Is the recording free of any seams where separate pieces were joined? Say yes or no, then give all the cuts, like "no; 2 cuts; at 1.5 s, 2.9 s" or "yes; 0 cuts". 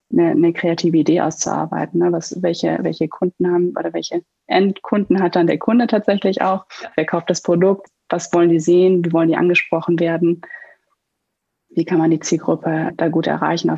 yes; 0 cuts